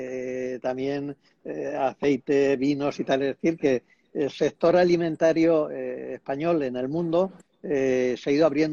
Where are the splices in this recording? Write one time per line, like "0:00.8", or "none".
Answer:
none